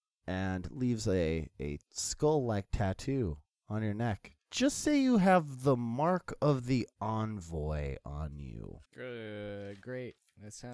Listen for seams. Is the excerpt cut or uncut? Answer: cut